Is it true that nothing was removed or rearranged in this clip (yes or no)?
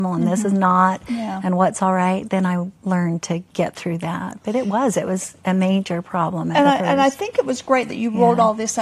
no